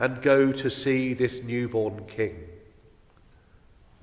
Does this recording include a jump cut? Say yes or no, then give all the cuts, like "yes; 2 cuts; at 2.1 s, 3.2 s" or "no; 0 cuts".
no; 0 cuts